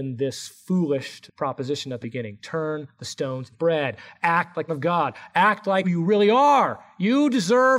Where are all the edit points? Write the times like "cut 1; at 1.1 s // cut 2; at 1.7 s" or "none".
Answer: cut 1; at 1.3 s // cut 2; at 2.0 s // cut 3; at 3.5 s // cut 4; at 4.7 s // cut 5; at 5.8 s